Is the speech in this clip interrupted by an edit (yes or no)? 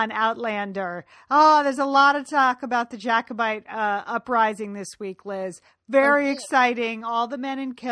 no